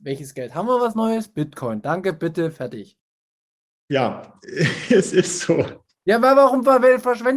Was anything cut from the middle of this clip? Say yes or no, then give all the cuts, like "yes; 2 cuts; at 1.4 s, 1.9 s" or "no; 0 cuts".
no; 0 cuts